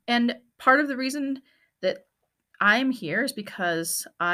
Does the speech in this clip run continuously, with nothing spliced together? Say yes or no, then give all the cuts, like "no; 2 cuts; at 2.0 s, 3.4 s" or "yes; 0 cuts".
yes; 0 cuts